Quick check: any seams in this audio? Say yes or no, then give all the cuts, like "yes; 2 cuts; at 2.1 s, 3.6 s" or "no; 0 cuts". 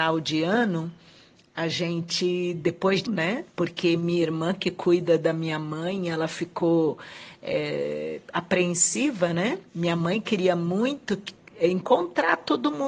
yes; 3 cuts; at 3.0 s, 3.5 s, 9.7 s